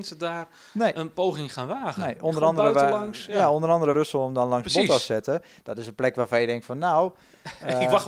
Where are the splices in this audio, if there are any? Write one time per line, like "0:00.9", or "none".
0:03.9